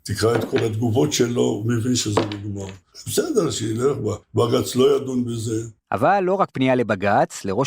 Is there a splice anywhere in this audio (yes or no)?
yes